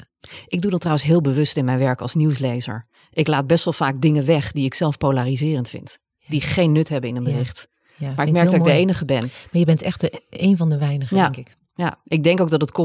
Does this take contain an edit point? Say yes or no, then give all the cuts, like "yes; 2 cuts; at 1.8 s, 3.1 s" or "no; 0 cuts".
no; 0 cuts